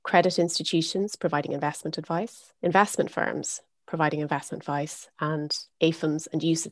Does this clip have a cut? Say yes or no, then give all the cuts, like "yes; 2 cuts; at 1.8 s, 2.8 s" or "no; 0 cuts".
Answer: yes; 2 cuts; at 2.6 s, 5.7 s